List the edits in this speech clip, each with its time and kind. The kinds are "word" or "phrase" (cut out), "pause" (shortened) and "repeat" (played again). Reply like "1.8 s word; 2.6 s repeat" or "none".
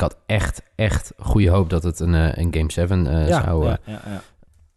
none